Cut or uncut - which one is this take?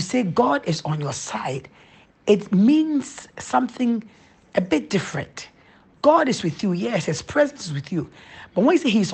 uncut